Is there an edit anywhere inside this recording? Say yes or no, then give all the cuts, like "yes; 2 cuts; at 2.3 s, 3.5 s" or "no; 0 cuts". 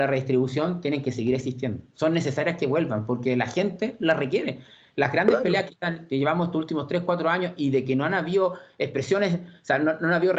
no; 0 cuts